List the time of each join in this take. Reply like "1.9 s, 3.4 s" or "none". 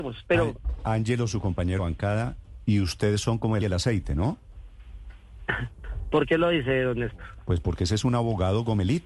1.8 s, 3.6 s